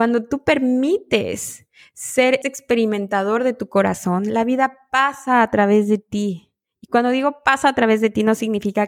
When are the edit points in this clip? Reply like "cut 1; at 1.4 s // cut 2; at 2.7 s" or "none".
cut 1; at 2.4 s